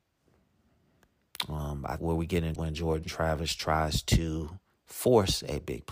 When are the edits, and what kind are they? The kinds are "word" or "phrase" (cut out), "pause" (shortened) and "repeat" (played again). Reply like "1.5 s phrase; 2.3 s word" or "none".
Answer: 2.0 s word; 2.6 s phrase